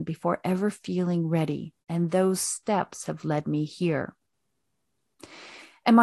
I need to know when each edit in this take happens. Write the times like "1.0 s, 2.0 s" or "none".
1.8 s